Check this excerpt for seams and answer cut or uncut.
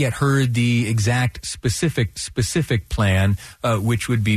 cut